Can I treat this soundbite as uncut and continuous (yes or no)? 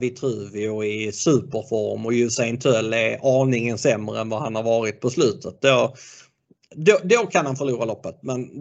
yes